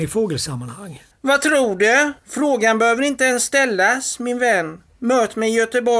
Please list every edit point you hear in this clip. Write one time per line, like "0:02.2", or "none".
0:01.1
0:02.2